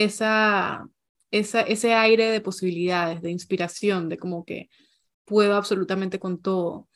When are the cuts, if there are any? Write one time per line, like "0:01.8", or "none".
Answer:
none